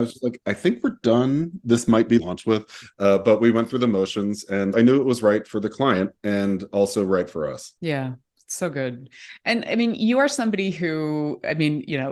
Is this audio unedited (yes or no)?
no